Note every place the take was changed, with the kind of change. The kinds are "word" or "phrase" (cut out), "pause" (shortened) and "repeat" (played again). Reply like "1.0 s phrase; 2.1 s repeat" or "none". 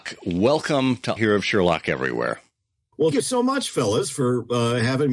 1.2 s word; 3.1 s word